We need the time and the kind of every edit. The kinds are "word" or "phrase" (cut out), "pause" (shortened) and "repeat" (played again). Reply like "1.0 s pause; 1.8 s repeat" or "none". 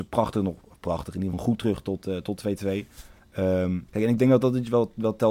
1.3 s word; 3.9 s pause